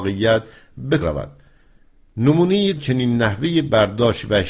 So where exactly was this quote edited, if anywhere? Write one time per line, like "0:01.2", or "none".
0:01.0
0:02.8

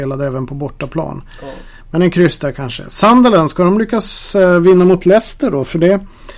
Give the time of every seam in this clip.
none

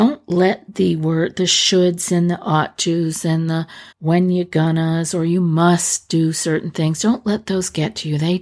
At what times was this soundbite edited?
0:03.9

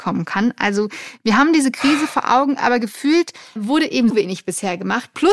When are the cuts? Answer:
0:03.6
0:04.1

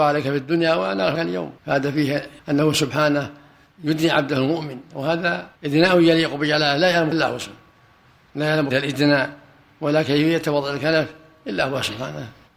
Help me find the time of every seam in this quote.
0:01.1
0:01.6
0:02.4
0:05.6
0:07.1
0:08.7

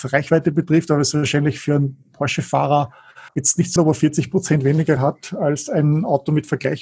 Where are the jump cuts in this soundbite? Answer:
0:03.3
0:03.8
0:05.0

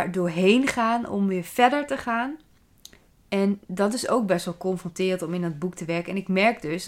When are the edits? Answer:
0:03.6

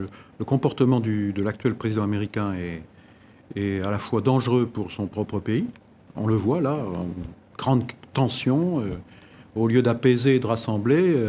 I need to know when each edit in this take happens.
none

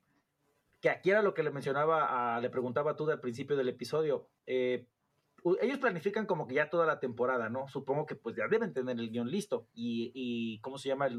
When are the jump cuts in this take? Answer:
none

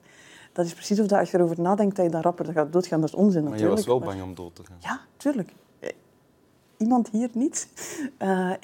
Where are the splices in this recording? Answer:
none

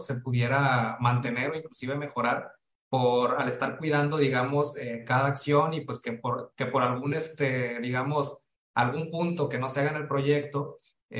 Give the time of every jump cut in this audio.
none

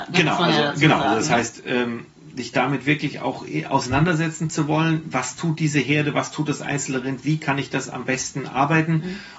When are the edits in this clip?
none

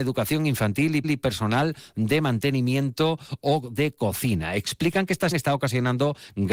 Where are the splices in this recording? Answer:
0:01.0
0:05.3

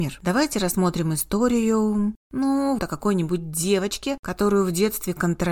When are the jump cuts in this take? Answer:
0:02.8

